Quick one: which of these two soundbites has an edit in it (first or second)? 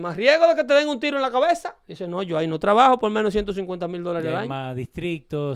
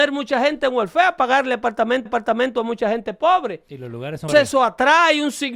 second